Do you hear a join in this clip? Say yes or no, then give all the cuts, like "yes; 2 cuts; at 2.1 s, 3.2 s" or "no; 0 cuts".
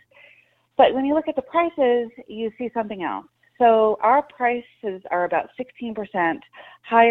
no; 0 cuts